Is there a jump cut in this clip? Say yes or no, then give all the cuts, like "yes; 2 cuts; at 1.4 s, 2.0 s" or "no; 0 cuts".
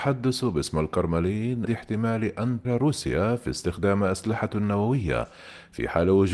yes; 2 cuts; at 1.7 s, 2.6 s